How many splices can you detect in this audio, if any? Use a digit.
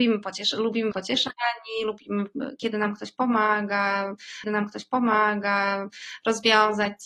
2